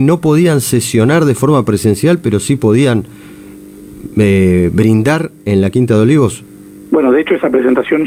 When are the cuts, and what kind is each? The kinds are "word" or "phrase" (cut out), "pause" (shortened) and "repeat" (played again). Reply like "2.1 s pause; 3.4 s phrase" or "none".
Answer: none